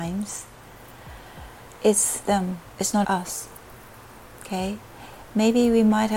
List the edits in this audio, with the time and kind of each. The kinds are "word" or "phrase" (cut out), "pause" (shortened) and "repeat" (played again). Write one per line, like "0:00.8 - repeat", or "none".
0:02.2 - word
0:03.0 - word